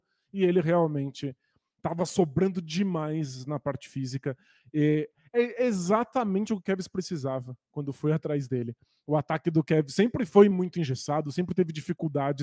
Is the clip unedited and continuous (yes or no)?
yes